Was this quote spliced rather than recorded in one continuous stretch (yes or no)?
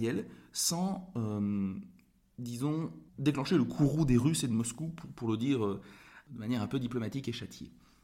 yes